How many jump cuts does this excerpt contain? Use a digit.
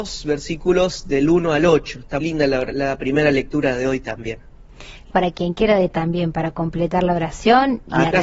3